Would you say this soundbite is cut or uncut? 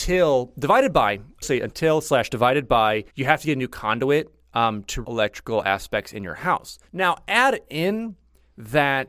cut